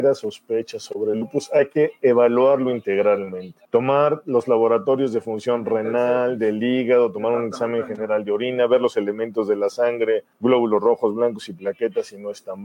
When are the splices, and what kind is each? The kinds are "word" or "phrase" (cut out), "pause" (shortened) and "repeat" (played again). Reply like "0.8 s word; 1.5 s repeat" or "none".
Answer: 3.6 s pause; 10.3 s pause